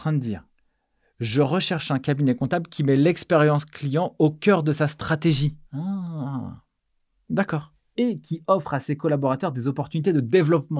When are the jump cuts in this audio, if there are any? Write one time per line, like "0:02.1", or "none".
0:05.6